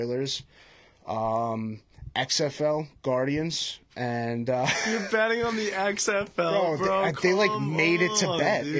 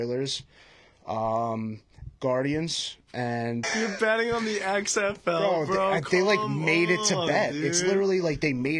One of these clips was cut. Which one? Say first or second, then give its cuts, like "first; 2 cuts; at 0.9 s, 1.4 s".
second; 2 cuts; at 2.1 s, 3.6 s